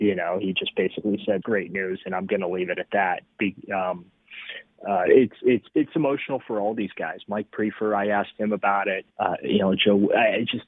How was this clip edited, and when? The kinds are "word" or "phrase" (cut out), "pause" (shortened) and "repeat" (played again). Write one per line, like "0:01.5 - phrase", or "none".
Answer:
0:01.4 - phrase
0:05.7 - pause
0:09.1 - pause